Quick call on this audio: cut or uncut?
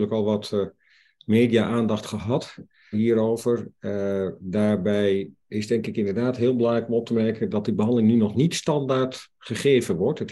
cut